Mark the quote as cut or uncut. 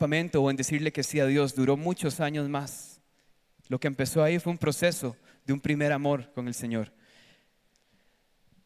uncut